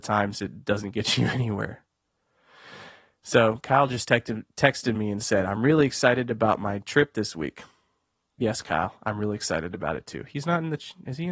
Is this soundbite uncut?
yes; 0 cuts

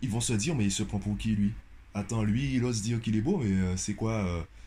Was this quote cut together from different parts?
no; 0 cuts

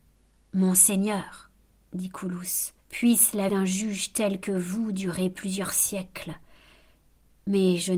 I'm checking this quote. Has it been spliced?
yes; 2 cuts; at 2.8 s, 3.5 s

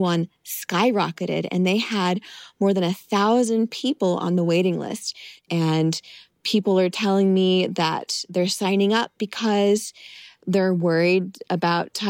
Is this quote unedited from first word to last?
no; 1 cut; at 6.3 s

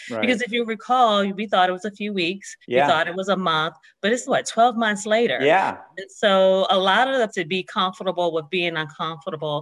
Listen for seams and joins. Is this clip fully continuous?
no; 3 cuts; at 2.6 s, 4.3 s, 7.3 s

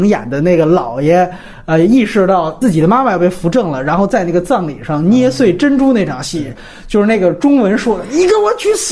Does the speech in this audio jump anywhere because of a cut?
no; 0 cuts

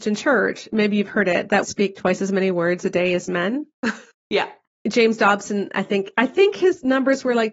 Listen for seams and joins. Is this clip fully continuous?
no; 1 cut; at 1.6 s

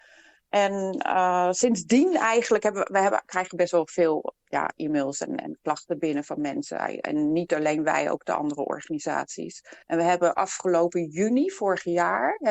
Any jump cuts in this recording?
yes; 1 cut; at 9.8 s

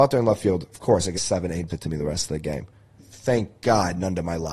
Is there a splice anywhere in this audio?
yes; 3 cuts; at 1.1 s, 1.7 s, 3.0 s

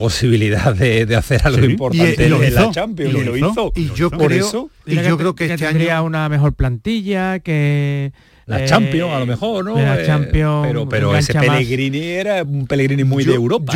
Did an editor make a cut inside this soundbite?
no; 0 cuts

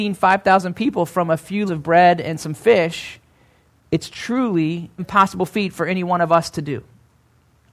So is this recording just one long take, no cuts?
no; 2 cuts; at 1.7 s, 5.0 s

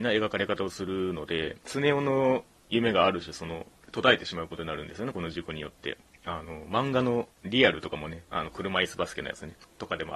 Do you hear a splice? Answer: yes; 2 cuts; at 7.3 s, 8.3 s

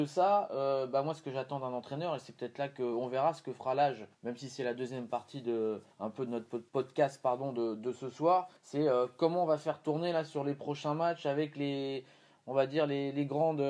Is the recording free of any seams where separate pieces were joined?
no; 4 cuts; at 4.1 s, 5.9 s, 6.7 s, 8.6 s

